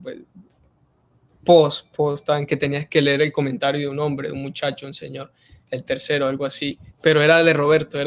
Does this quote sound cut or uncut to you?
uncut